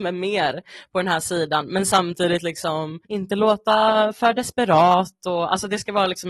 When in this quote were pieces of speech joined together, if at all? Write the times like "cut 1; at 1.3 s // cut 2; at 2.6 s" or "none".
cut 1; at 3.0 s